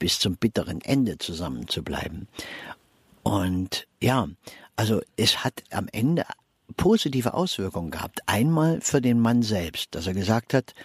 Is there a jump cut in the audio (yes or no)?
no